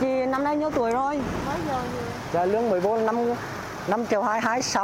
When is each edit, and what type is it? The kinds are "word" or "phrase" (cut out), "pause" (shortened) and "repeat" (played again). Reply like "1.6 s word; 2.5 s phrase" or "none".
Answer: 1.4 s word